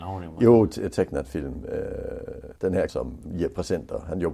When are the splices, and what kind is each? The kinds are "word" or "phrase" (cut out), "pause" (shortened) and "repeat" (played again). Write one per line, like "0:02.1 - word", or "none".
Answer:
0:02.6 - pause
0:02.9 - word
0:03.2 - word